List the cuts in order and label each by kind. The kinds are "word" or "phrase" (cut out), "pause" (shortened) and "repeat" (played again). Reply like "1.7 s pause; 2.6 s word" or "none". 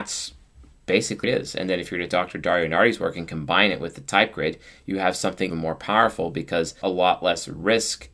1.2 s word; 2.1 s word; 5.5 s word; 6.8 s word